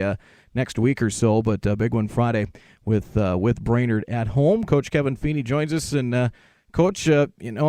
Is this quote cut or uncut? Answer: uncut